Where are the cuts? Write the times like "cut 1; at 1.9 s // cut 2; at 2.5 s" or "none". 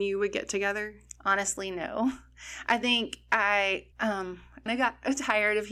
cut 1; at 3.9 s // cut 2; at 4.7 s